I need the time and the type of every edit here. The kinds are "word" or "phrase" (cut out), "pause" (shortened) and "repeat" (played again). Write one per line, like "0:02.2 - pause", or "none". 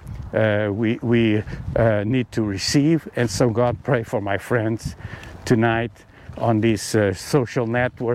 0:03.7 - word